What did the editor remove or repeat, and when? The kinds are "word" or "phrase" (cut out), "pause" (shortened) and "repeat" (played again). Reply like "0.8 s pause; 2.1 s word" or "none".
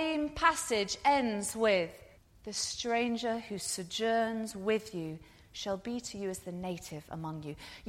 2.2 s pause